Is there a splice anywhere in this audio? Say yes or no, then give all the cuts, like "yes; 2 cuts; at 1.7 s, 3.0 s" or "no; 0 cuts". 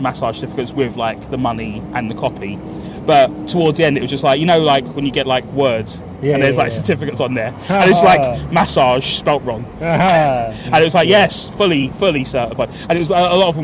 no; 0 cuts